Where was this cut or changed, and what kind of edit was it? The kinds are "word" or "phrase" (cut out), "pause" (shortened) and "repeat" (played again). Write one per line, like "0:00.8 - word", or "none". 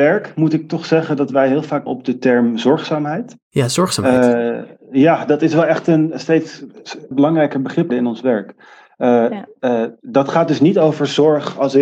0:01.9 - word
0:07.1 - word
0:07.9 - phrase

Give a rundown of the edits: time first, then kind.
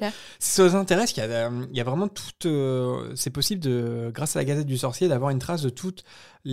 none

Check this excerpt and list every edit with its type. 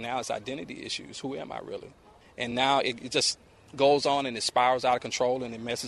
none

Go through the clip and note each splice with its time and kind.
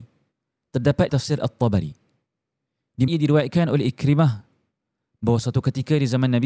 0:01.1 - word
0:03.1 - word

